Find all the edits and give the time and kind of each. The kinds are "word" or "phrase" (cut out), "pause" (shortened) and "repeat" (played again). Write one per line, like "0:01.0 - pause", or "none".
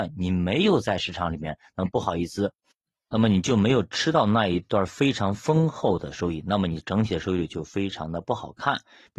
none

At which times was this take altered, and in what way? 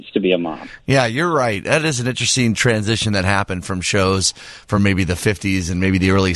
none

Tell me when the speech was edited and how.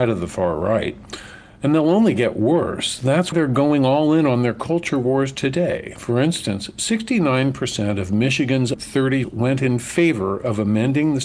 0:03.3 - word
0:08.7 - word
0:09.2 - word

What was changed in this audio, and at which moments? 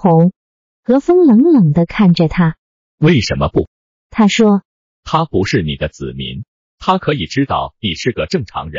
none

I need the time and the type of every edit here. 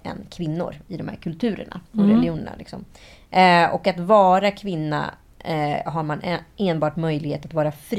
none

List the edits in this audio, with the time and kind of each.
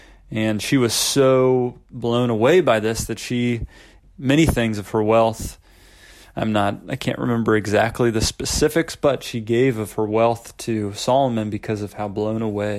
0:04.0 - phrase

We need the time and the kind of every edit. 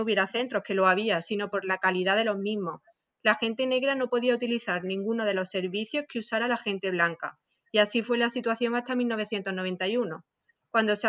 none

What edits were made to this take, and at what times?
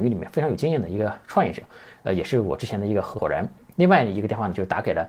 none

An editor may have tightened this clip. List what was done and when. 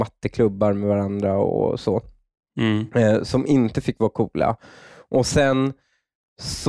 none

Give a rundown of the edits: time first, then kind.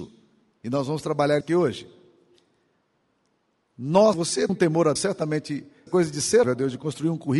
0:01.4 - word
0:04.1 - word
0:04.5 - word
0:05.0 - word
0:05.9 - word
0:06.4 - word

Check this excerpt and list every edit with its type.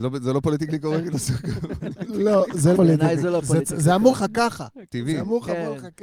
0:01.1 - word
0:02.7 - word
0:04.1 - word

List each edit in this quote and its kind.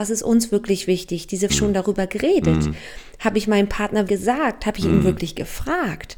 0:01.5 - phrase
0:04.1 - word

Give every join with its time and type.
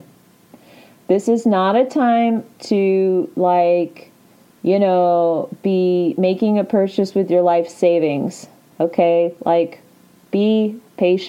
none

